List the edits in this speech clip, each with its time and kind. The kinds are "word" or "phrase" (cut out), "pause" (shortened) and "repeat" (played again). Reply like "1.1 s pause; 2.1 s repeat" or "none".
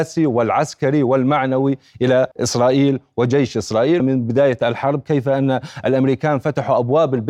2.3 s pause; 4.0 s phrase